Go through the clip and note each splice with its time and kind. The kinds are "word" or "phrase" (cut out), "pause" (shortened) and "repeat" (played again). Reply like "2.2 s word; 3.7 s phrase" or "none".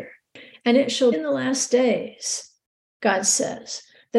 1.1 s word